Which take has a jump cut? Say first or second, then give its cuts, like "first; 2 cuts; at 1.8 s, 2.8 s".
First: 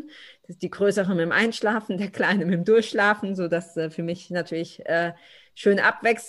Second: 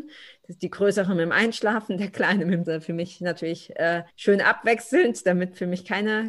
second; 2 cuts; at 2.6 s, 4.1 s